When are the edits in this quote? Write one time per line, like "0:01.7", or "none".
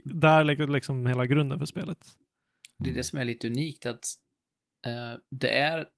none